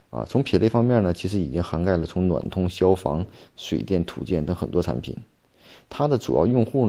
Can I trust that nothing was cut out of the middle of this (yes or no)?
yes